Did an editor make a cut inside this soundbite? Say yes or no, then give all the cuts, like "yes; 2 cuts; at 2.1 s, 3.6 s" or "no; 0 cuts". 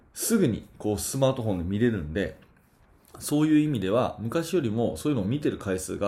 no; 0 cuts